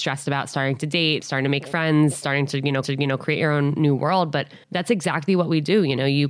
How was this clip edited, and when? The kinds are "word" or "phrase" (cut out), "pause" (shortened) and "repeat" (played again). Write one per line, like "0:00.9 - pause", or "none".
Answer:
0:01.2 - word
0:02.8 - repeat
0:04.6 - pause

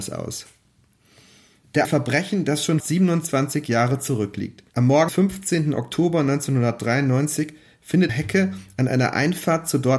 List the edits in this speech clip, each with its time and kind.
0:01.8 - phrase
0:02.8 - word
0:04.7 - pause
0:05.1 - word
0:08.1 - phrase

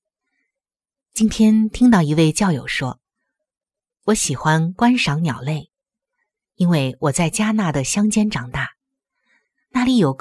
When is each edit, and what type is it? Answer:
none

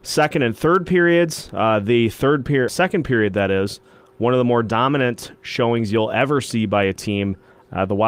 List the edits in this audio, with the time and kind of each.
0:02.7 - word

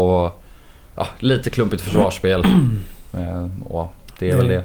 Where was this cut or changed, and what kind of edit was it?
none

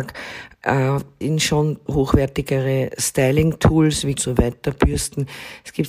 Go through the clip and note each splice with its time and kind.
0:01.2 - word
0:01.9 - word
0:04.2 - phrase

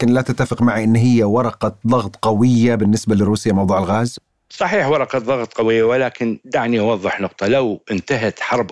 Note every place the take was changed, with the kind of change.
none

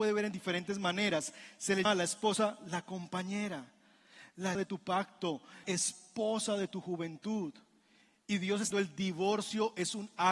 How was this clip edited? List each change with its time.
0:01.8 - word
0:04.5 - word
0:05.6 - word
0:08.7 - word

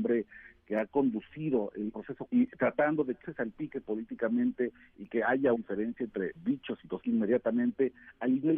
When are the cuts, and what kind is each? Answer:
0:01.9 - word
0:02.3 - word
0:03.2 - word
0:05.5 - word
0:06.4 - word
0:07.0 - word

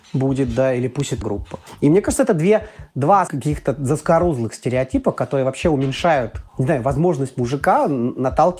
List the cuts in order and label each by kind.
0:01.2 - word
0:03.3 - word
0:06.5 - pause

